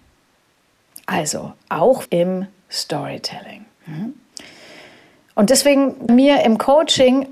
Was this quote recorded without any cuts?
no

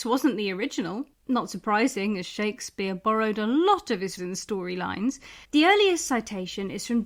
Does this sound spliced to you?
yes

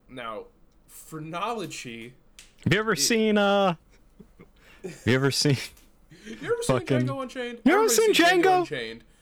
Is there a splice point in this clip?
yes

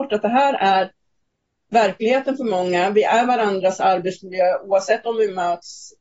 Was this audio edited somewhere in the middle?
no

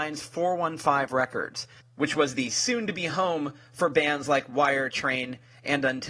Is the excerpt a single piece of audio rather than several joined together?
yes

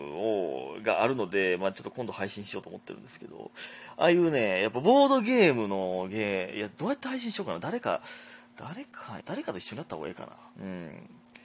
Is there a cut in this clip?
yes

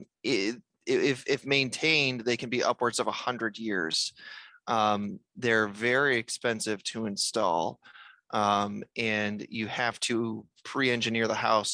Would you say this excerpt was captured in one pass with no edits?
yes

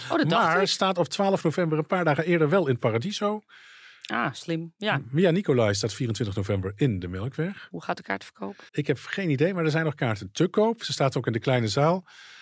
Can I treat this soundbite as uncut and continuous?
no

